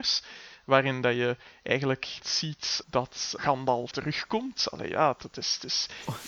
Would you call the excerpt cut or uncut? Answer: cut